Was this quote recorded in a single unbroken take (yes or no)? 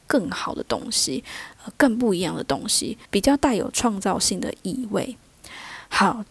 no